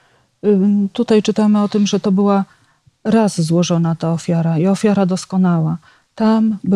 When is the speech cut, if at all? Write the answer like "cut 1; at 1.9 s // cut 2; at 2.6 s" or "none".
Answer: none